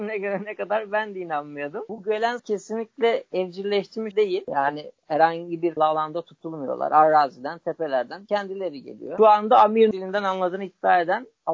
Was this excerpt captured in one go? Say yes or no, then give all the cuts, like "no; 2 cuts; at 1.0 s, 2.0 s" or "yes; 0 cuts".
no; 4 cuts; at 2.4 s, 4.1 s, 5.8 s, 9.9 s